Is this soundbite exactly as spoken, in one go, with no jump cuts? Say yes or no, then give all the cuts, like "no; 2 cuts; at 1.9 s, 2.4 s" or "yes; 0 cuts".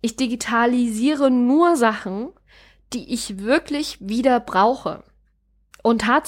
yes; 0 cuts